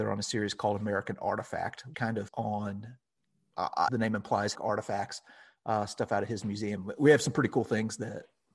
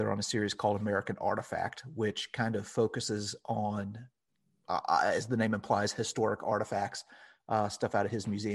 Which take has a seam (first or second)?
first